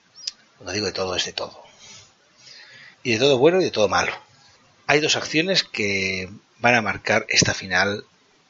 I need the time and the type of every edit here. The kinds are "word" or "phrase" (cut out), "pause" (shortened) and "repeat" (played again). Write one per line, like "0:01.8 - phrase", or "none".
0:02.9 - pause
0:04.6 - pause

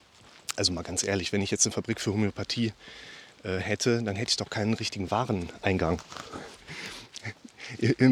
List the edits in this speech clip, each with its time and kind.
0:06.6 - pause

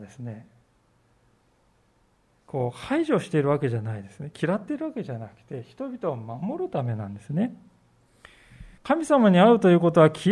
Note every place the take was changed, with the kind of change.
0:08.8 - pause

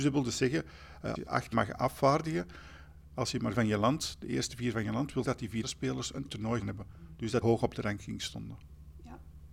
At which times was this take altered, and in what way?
0:01.1 - word
0:01.5 - word
0:03.5 - word
0:05.2 - word
0:05.6 - word
0:06.3 - word
0:06.6 - word
0:07.4 - word

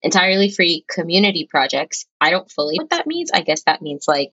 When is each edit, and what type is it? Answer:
0:02.8 - word

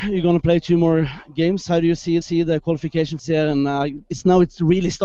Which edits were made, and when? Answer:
0:02.2 - repeat
0:03.2 - phrase
0:04.1 - word

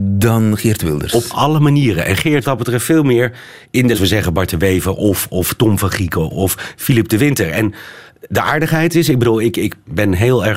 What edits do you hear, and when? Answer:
0:02.4 - phrase
0:03.9 - phrase
0:06.3 - word

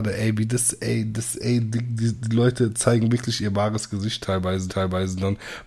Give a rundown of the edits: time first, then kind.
0:04.7 - repeat

